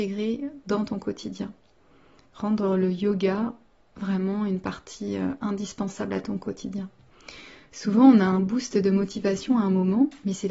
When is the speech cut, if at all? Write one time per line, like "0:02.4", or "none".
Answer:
none